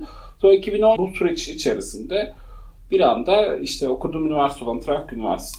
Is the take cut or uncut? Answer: cut